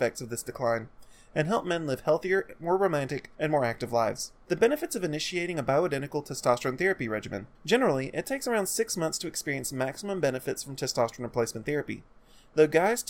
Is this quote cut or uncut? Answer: cut